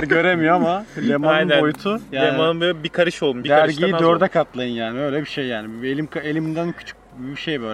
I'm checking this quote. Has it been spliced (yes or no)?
no